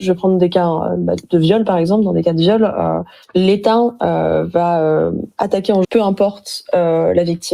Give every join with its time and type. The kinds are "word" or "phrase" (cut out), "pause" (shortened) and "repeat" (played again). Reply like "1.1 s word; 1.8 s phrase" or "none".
5.8 s word